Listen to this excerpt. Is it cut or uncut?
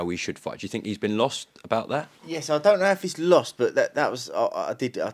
uncut